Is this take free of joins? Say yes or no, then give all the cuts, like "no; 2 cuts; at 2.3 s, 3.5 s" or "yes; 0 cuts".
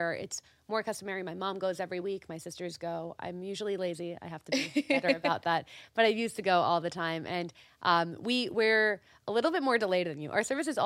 yes; 0 cuts